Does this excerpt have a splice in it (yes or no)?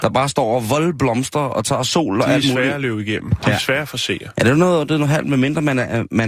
no